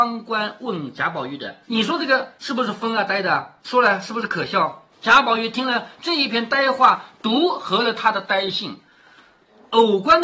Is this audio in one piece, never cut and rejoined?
no; 4 cuts; at 1.6 s, 2.4 s, 3.6 s, 4.9 s

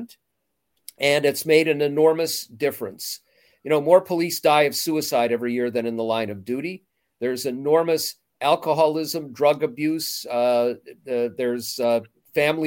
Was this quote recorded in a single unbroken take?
yes; 0 cuts

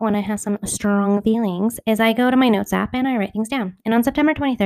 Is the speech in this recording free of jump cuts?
yes; 0 cuts

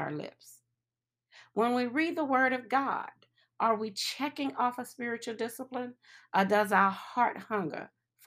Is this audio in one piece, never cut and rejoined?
yes; 0 cuts

